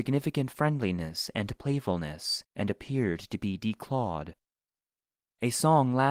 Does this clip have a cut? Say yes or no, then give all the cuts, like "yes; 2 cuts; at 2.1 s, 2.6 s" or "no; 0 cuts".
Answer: no; 0 cuts